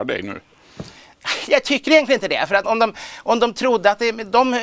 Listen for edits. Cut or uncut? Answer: cut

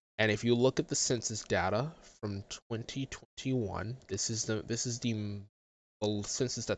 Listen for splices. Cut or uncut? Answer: uncut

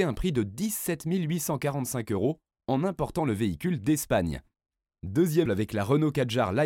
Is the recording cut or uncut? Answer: cut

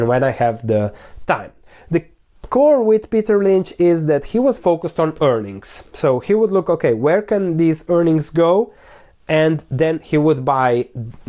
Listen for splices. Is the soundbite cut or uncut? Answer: uncut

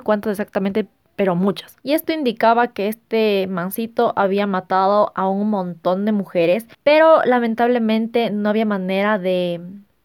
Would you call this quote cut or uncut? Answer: cut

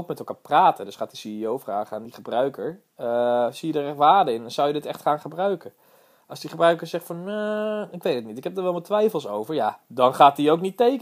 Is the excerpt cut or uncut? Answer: uncut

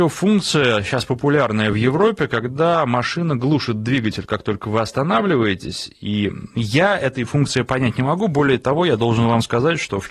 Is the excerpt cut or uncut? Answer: uncut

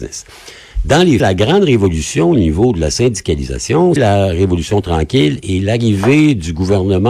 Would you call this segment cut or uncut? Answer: cut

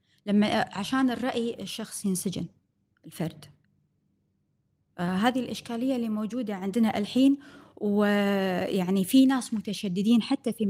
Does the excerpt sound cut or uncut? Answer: uncut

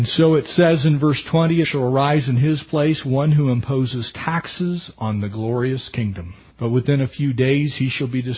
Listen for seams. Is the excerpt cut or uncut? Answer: cut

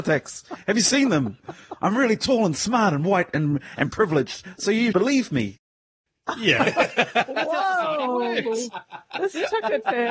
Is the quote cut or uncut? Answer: cut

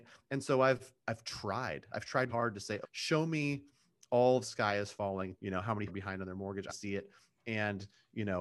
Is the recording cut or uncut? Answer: cut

